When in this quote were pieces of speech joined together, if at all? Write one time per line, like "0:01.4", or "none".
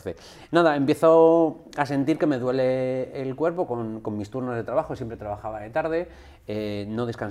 none